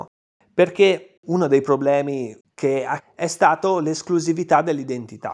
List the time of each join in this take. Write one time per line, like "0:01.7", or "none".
0:01.2
0:02.4
0:03.0